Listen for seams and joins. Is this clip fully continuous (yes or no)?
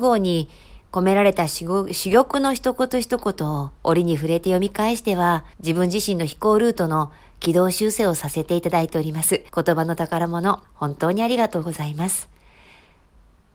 no